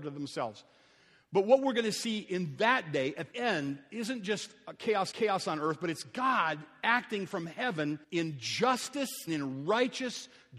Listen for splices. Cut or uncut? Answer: cut